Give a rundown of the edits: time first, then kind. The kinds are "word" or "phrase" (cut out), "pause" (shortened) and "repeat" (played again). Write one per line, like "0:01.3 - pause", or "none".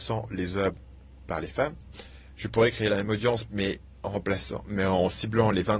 none